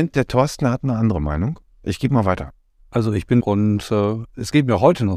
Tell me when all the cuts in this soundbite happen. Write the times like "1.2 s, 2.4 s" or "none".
3.4 s

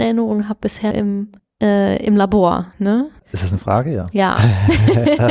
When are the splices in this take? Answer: 0.9 s, 1.4 s, 3.2 s

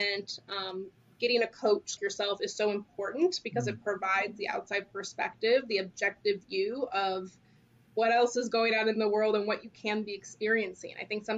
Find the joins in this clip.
2.0 s

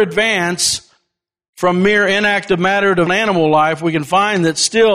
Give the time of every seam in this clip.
3.1 s

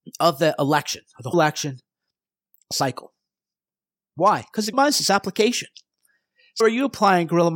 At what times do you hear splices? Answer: 1.3 s, 4.7 s, 6.6 s

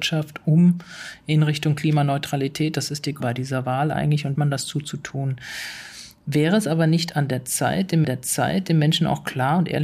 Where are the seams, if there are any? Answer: 3.2 s, 4.3 s, 8.0 s

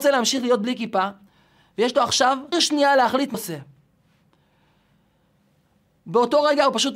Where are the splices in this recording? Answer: 2.5 s, 3.3 s

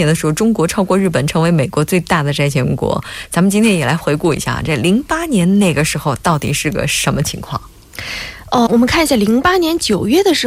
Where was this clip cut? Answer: 8.7 s

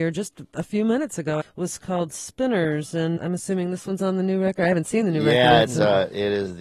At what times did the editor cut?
1.4 s, 3.2 s

